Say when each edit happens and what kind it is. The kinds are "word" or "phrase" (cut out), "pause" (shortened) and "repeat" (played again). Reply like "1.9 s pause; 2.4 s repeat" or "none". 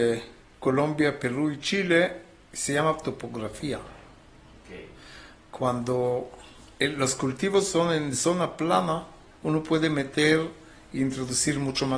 none